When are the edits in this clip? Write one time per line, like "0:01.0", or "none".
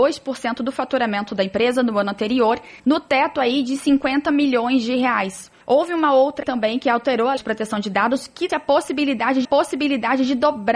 0:02.8
0:05.6
0:06.4
0:07.4
0:08.5
0:09.4